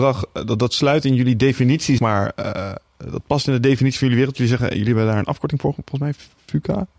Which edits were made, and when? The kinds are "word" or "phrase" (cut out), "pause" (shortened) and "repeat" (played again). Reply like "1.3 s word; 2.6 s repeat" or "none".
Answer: 2.0 s word